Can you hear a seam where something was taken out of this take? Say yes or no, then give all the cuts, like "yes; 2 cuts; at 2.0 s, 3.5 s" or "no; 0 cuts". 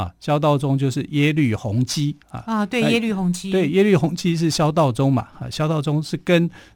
yes; 1 cut; at 2.2 s